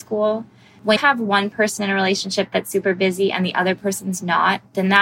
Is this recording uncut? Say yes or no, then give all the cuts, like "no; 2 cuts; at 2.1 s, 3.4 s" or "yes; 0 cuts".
no; 1 cut; at 1.0 s